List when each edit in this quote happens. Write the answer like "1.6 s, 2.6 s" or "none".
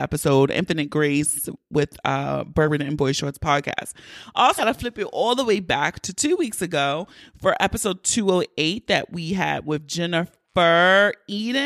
4.6 s